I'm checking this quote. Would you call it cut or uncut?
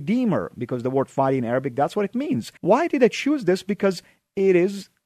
cut